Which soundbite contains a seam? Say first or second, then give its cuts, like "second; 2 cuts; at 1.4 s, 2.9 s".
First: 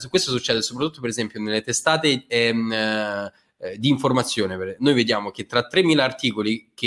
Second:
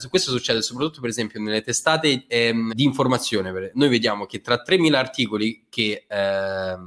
second; 1 cut; at 2.7 s